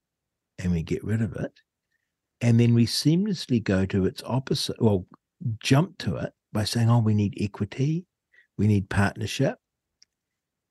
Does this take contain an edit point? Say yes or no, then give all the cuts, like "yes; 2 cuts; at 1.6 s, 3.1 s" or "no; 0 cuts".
no; 0 cuts